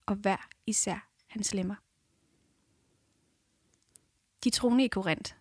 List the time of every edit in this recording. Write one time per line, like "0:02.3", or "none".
none

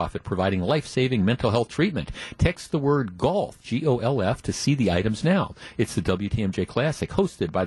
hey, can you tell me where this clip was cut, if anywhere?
none

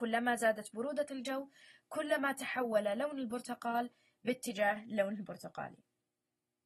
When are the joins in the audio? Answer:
none

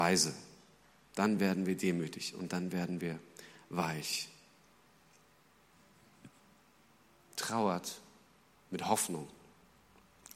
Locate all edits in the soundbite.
none

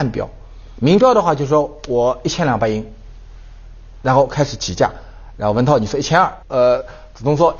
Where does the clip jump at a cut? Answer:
0:06.4

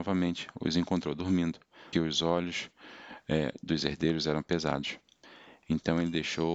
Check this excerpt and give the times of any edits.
0:01.9

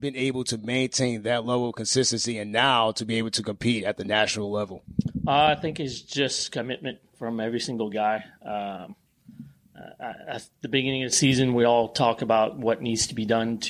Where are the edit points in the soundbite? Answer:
none

